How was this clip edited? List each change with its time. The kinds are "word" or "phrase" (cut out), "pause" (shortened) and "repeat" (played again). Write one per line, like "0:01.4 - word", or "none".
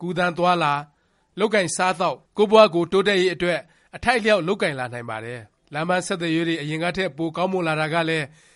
0:02.2 - pause